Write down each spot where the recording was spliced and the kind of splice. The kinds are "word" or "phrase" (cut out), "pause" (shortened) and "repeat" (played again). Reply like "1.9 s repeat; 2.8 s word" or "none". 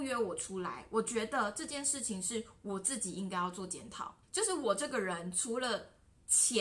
4.2 s pause